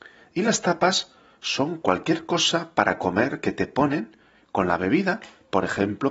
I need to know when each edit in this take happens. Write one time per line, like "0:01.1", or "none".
none